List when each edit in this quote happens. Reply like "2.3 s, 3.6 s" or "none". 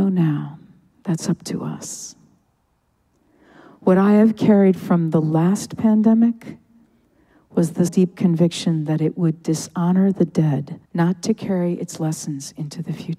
4.8 s, 7.9 s, 10.8 s